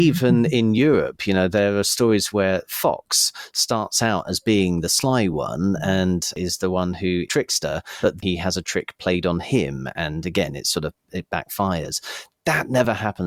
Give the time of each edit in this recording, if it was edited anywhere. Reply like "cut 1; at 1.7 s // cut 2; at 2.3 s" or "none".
cut 1; at 7.3 s // cut 2; at 8.2 s